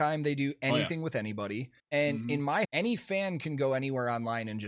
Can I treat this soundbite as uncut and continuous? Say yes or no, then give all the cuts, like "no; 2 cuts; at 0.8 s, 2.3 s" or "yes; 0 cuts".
no; 2 cuts; at 1.8 s, 2.6 s